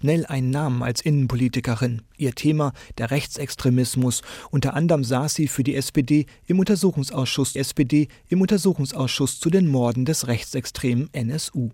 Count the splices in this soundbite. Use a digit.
1